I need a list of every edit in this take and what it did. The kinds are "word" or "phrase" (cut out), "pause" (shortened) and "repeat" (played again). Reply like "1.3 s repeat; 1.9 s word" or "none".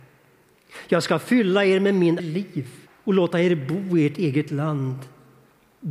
2.2 s phrase; 2.9 s pause